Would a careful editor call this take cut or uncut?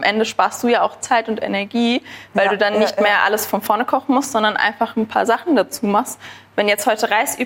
uncut